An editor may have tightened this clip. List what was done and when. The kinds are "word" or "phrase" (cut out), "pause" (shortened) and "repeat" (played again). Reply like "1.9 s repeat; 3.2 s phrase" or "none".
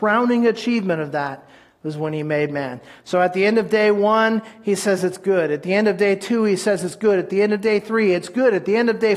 none